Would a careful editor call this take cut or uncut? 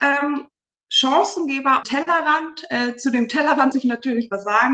cut